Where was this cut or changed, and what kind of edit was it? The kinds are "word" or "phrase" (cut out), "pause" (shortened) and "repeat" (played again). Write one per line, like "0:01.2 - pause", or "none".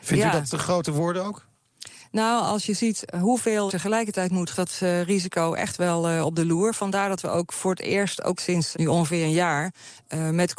0:03.7 - word
0:04.5 - phrase
0:08.4 - word
0:08.7 - word